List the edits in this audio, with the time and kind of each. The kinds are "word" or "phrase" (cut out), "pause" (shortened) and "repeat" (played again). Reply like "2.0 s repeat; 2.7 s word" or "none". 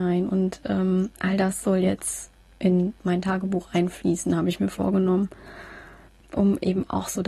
none